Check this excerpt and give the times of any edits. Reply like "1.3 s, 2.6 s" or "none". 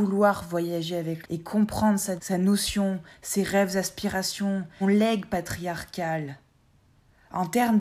1.2 s, 2.2 s, 4.8 s

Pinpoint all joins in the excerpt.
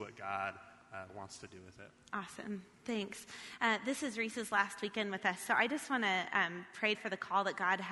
6.9 s

